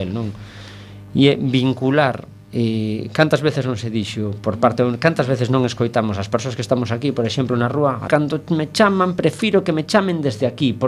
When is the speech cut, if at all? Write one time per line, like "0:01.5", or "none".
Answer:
0:08.1

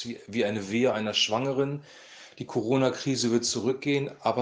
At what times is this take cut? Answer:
none

